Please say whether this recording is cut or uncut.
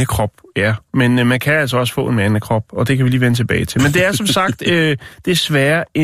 uncut